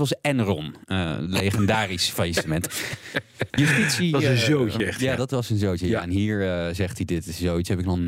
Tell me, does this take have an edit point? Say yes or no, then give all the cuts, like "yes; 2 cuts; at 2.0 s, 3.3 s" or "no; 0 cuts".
yes; 1 cut; at 3.5 s